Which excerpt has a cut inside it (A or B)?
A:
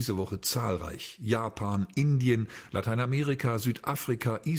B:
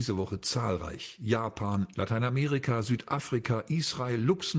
B